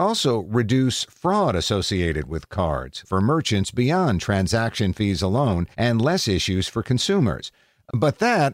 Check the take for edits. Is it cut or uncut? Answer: cut